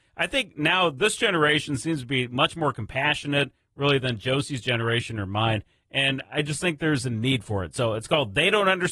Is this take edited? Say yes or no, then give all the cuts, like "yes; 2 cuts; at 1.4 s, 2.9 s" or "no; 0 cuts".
no; 0 cuts